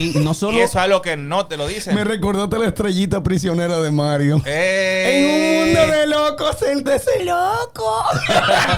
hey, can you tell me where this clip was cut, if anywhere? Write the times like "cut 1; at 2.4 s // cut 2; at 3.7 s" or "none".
cut 1; at 6.9 s // cut 2; at 7.2 s